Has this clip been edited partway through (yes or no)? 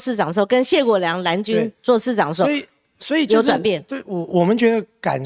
no